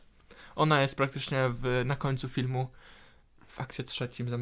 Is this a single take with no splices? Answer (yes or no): yes